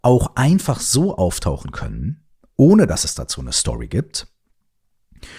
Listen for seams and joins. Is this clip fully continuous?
yes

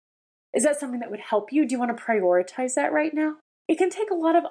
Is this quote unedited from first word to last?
yes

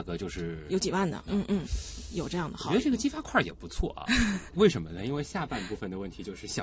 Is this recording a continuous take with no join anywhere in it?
no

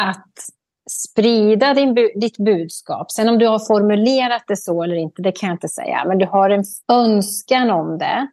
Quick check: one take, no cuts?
no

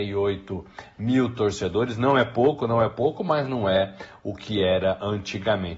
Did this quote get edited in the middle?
no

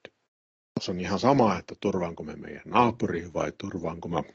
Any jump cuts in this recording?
no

